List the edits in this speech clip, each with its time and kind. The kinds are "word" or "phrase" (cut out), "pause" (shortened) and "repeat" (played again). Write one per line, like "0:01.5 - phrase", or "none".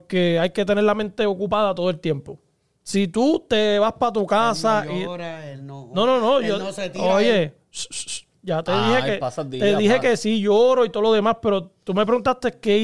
none